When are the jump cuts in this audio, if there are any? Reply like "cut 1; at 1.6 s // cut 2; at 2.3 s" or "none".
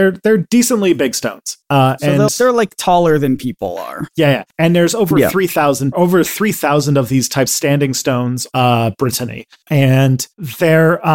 cut 1; at 2.3 s // cut 2; at 5.9 s // cut 3; at 7.5 s // cut 4; at 8.5 s